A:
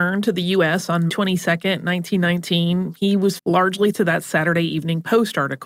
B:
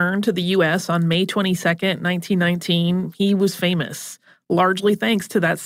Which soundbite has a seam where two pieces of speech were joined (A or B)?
A